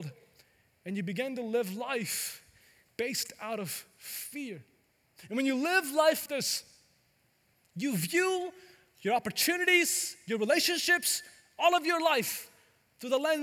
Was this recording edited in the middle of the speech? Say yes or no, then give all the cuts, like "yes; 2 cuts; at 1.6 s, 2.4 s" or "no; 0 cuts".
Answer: yes; 1 cut; at 6.3 s